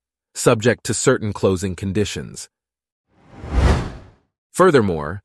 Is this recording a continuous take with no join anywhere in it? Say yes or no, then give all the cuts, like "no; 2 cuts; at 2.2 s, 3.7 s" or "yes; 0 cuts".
yes; 0 cuts